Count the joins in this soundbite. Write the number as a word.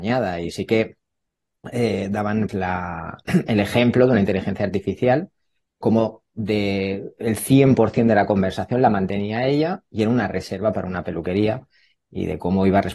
two